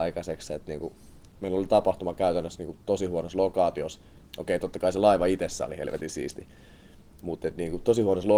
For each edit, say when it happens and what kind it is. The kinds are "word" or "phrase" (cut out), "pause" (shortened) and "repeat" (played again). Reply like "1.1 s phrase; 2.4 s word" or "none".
none